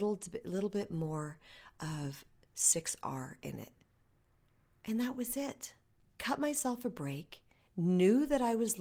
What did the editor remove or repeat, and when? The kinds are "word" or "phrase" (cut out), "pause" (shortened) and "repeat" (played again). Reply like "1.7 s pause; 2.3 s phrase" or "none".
none